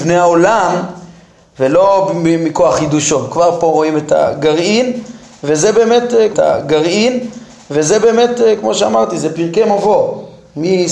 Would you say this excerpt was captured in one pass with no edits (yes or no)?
no